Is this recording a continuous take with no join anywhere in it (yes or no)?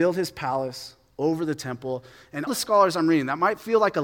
no